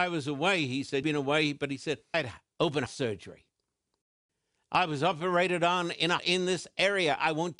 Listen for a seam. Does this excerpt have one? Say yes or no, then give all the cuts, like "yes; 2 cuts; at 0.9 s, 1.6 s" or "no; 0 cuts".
yes; 4 cuts; at 1.0 s, 2.1 s, 2.9 s, 6.2 s